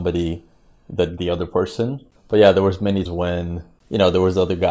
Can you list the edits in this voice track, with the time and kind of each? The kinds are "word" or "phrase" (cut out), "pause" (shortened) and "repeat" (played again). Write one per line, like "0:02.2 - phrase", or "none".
0:01.2 - word
0:02.2 - pause
0:03.1 - word